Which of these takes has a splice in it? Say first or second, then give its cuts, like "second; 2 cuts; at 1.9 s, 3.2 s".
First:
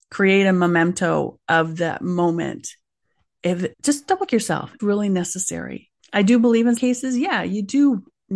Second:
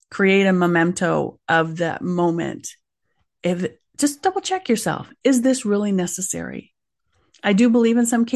first; 5 cuts; at 3.7 s, 4.3 s, 4.8 s, 6.0 s, 6.8 s